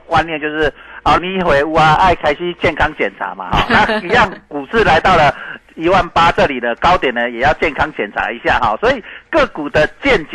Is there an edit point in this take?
yes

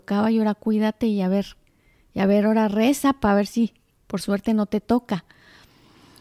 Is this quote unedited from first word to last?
yes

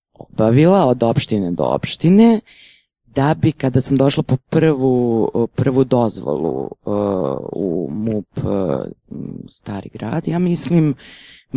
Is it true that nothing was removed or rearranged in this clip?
yes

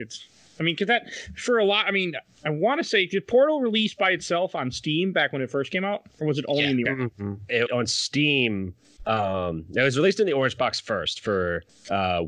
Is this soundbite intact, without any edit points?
no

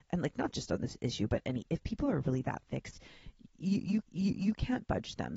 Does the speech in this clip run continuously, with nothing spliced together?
no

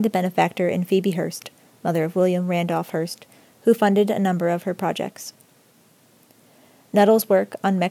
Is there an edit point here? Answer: no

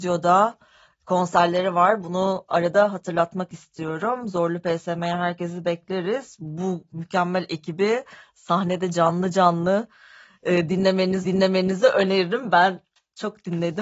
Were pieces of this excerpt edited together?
yes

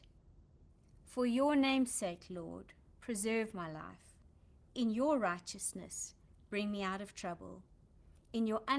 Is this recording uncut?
yes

